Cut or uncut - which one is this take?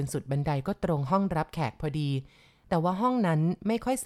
uncut